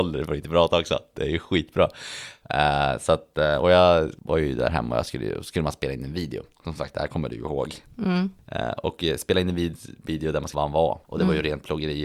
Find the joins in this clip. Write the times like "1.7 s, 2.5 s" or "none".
6.5 s, 10.5 s